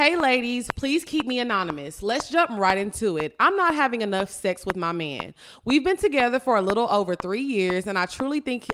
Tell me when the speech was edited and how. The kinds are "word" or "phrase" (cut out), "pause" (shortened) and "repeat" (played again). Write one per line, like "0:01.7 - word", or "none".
none